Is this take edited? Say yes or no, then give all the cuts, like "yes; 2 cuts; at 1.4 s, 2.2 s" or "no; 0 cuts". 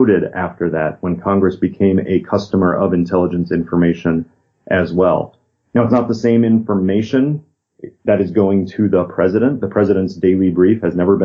no; 0 cuts